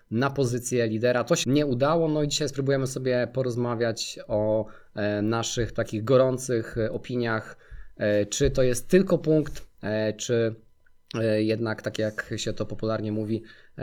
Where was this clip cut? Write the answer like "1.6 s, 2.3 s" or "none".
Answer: 1.4 s